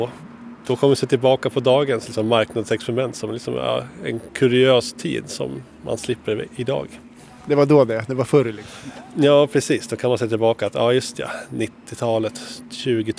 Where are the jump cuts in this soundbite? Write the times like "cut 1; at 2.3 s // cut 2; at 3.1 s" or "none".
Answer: none